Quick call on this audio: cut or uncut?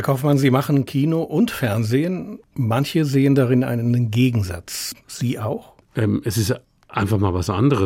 uncut